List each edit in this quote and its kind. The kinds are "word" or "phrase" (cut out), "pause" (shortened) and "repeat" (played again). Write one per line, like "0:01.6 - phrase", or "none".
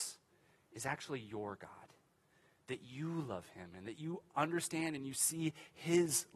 none